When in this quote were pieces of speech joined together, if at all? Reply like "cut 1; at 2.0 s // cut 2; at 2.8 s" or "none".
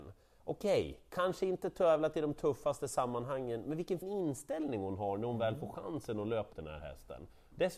cut 1; at 4.0 s // cut 2; at 6.5 s